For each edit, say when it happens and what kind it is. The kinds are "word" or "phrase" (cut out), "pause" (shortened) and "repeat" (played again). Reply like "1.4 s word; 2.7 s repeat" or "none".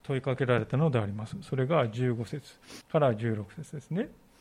2.8 s pause